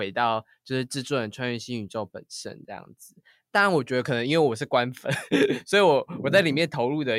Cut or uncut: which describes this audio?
uncut